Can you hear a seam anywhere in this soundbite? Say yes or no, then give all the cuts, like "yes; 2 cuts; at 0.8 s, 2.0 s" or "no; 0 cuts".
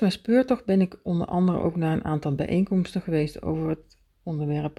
no; 0 cuts